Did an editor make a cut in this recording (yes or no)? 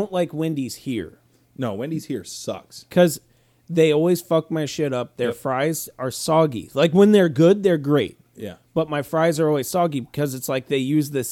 no